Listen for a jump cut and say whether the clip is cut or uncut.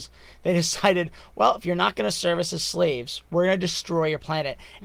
cut